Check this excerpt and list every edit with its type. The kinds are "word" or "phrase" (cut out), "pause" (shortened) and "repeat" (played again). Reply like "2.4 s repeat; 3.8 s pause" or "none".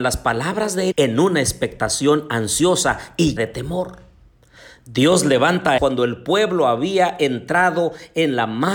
0.9 s word; 3.4 s word; 5.8 s word